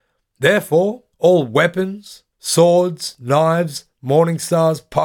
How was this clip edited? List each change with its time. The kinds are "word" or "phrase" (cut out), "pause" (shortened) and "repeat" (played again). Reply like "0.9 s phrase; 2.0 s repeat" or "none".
1.1 s pause; 2.3 s pause